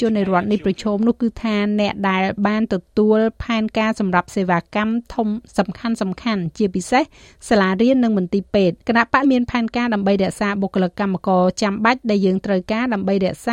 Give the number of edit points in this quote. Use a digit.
2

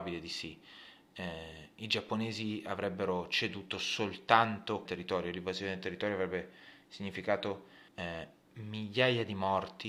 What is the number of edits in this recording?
2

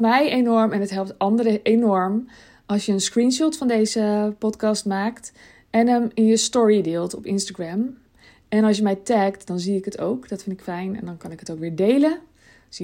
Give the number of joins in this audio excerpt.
0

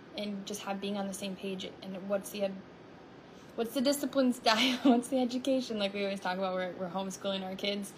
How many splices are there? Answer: 0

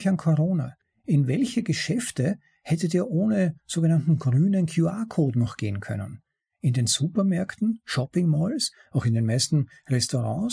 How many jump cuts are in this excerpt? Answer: 0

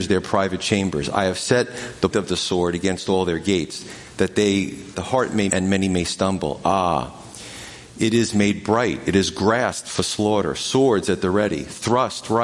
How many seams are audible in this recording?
3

